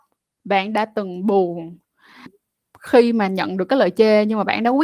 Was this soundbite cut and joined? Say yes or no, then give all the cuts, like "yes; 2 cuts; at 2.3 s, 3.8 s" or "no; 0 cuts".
yes; 1 cut; at 2.3 s